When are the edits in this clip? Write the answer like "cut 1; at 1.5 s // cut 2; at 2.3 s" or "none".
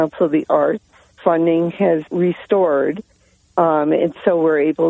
cut 1; at 1.2 s // cut 2; at 2.1 s